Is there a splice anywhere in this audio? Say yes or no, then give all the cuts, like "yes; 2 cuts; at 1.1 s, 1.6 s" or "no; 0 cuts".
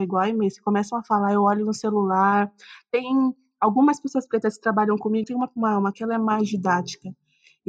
yes; 2 cuts; at 5.2 s, 5.9 s